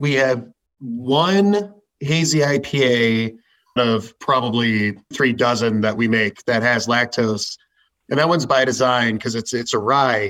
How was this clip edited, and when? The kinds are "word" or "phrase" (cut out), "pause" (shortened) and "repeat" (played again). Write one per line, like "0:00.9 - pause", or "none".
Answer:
0:03.8 - word
0:05.1 - word
0:06.4 - word